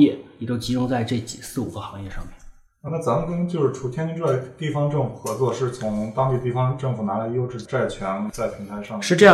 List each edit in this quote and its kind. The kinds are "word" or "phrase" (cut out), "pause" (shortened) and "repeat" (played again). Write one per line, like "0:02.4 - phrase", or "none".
0:02.9 - word

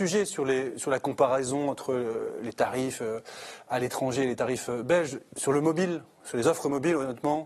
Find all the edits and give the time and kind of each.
none

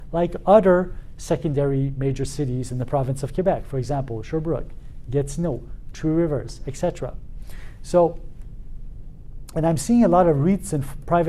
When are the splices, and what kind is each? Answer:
none

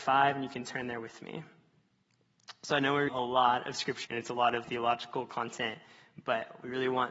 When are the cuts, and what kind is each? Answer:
0:03.1 - word
0:04.0 - word
0:04.6 - word

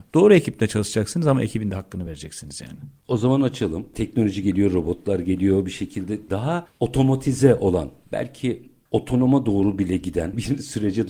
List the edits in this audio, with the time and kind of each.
none

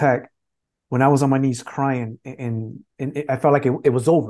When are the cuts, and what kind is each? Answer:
0:02.9 - pause

